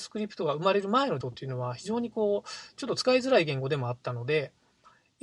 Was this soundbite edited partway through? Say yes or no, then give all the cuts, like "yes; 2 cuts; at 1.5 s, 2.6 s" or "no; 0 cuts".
yes; 1 cut; at 1.2 s